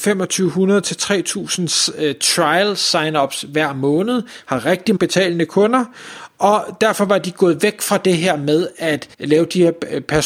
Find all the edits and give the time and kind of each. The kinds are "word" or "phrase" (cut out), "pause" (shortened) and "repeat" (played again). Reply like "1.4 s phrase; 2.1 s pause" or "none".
5.0 s word; 9.1 s pause